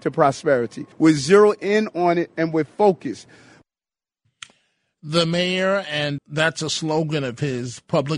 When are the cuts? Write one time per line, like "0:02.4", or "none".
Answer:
0:00.9
0:06.2

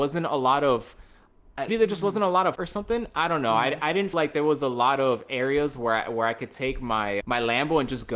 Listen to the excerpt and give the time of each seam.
0:01.7
0:02.5
0:04.1
0:07.2

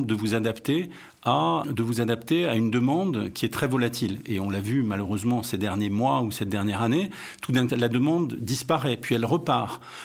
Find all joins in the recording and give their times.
0:01.6
0:07.7

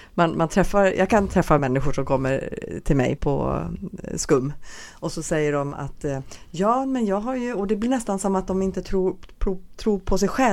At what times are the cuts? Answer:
0:01.6
0:03.2

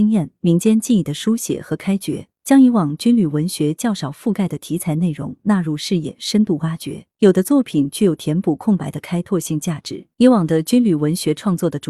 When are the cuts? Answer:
0:02.4
0:07.1
0:10.1

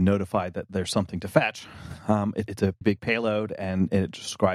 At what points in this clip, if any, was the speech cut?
0:02.5
0:02.8

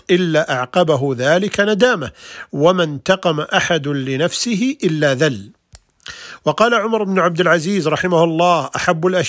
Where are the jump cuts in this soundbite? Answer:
none

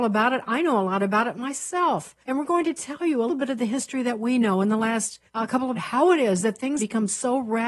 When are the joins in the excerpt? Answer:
0:02.2
0:03.3
0:05.3
0:05.7
0:06.8

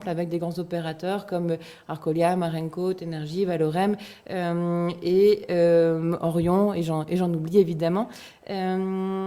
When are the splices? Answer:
none

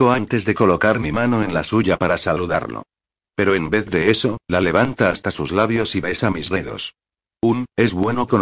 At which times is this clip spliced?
none

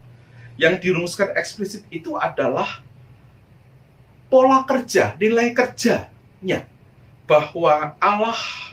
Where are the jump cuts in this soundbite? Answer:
none

